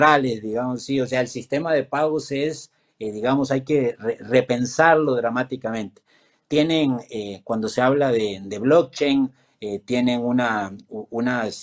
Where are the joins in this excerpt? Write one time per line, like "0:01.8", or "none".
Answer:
none